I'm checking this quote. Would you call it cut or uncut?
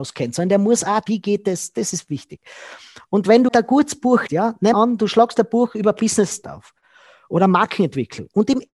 cut